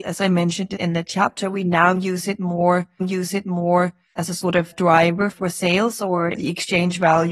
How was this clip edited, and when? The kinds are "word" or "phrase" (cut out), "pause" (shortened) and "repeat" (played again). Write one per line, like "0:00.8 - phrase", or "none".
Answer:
0:03.0 - repeat